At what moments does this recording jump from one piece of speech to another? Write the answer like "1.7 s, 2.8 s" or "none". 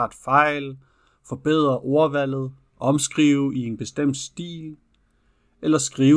none